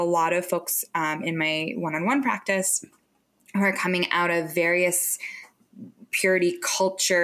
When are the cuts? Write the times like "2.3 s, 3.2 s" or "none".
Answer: none